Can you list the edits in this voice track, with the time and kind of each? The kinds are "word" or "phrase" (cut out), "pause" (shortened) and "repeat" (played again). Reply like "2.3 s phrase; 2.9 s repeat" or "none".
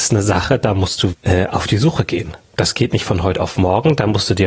1.1 s word